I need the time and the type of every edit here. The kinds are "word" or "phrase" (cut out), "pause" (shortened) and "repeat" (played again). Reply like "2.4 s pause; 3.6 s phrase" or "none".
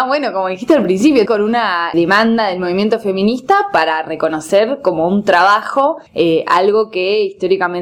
1.3 s phrase; 1.9 s word; 6.1 s pause